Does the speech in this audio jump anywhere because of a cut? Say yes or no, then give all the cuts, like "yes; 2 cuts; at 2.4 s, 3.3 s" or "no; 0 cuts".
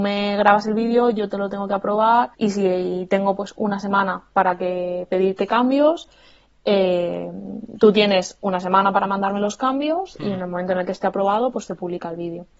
yes; 1 cut; at 2.3 s